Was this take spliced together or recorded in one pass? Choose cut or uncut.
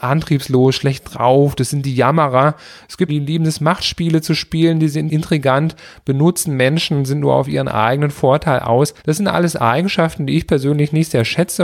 cut